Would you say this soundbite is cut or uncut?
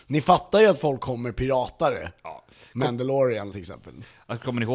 cut